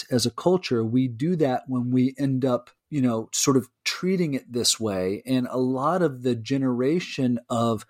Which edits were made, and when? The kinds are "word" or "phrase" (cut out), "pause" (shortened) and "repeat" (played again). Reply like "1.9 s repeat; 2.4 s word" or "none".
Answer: 2.8 s pause